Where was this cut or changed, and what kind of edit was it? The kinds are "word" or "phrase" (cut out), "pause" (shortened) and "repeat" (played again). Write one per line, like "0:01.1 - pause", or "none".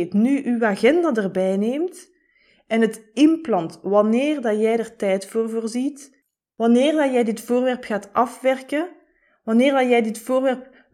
none